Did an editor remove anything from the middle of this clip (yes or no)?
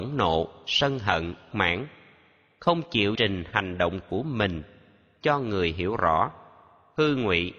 yes